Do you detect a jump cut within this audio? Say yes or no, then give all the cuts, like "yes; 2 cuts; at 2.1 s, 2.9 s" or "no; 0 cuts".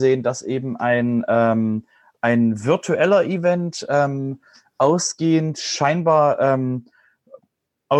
no; 0 cuts